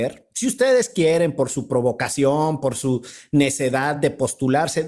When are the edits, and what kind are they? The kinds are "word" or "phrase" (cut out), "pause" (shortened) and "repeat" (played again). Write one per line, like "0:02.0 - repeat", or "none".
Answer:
none